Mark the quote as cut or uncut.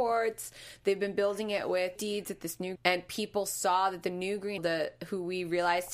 cut